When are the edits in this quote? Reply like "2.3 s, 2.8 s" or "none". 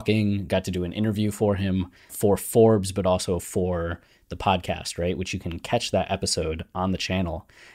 2.1 s